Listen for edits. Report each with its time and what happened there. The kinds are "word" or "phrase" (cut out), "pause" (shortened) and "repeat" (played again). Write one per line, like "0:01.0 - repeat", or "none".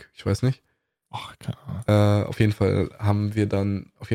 none